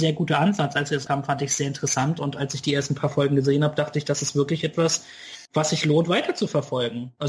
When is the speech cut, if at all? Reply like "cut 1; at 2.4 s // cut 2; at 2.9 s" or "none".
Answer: cut 1; at 1.1 s // cut 2; at 5.5 s